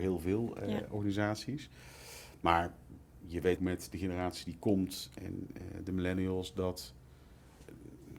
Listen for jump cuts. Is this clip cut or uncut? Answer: cut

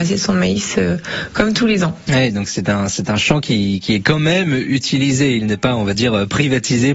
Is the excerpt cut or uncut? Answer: uncut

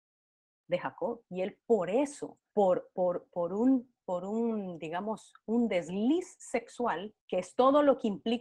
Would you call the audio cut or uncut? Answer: cut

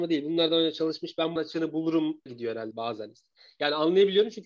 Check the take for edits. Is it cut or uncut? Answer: cut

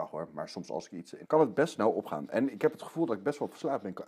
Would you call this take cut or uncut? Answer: cut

